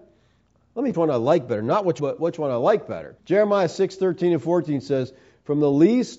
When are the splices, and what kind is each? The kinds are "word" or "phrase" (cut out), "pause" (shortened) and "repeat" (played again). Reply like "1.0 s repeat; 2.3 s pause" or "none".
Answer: 0.9 s phrase; 2.0 s phrase; 3.2 s pause

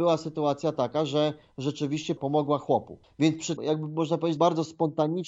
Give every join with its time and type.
2.2 s word; 3.0 s pause; 3.6 s word; 4.4 s word

